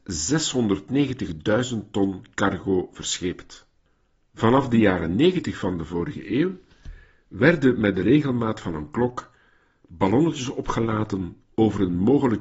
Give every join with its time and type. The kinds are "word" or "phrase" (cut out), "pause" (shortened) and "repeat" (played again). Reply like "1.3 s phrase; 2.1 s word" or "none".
none